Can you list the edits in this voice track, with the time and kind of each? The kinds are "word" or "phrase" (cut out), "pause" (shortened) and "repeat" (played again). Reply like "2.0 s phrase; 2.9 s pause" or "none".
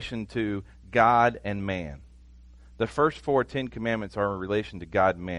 none